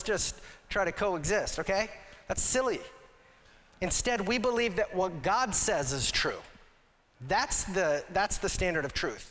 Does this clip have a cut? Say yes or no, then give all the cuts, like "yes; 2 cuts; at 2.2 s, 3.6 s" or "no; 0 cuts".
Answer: no; 0 cuts